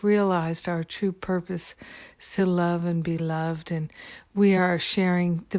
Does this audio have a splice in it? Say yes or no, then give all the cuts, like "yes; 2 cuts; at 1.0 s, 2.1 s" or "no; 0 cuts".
no; 0 cuts